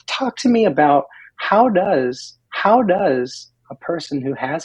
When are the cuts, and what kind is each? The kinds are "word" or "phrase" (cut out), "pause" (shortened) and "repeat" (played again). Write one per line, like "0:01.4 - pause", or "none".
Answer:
0:02.5 - repeat